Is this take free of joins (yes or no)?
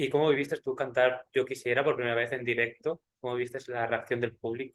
yes